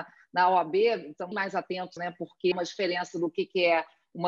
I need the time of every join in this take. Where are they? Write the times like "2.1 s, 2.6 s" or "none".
1.3 s, 2.0 s, 2.5 s

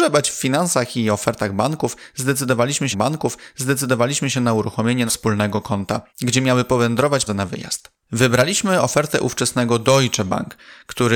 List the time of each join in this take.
2.9 s, 5.1 s, 6.1 s, 7.3 s, 8.0 s

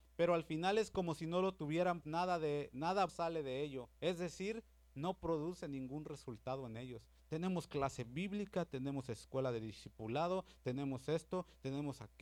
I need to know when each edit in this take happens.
2.0 s, 3.1 s, 4.0 s

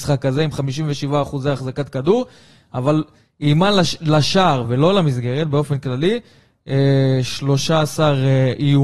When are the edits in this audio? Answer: none

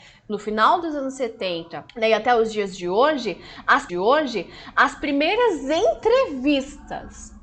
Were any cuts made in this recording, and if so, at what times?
1.9 s, 3.9 s

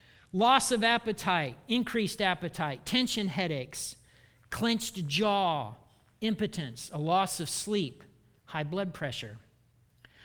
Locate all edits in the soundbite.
none

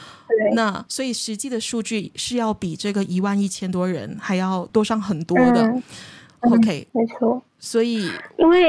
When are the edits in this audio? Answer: 6.9 s

